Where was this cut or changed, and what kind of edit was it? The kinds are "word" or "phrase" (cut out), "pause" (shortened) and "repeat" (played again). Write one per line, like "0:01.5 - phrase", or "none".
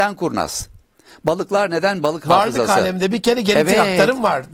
none

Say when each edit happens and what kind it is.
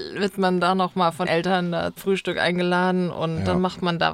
0:01.3 - word
0:02.0 - word

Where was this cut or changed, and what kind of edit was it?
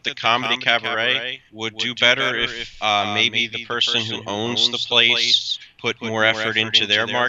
0:01.5 - pause
0:05.7 - pause

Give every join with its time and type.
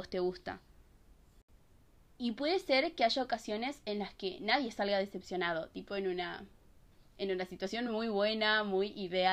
none

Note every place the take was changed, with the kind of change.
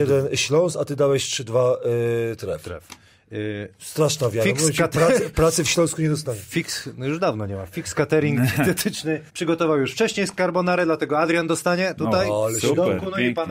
0:09.3 - pause

